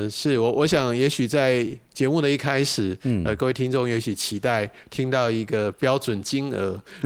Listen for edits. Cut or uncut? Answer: uncut